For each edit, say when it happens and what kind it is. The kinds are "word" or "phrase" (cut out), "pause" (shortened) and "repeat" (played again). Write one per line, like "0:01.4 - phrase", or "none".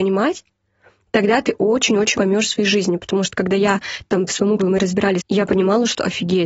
0:02.1 - word
0:04.3 - word
0:04.6 - word
0:05.2 - word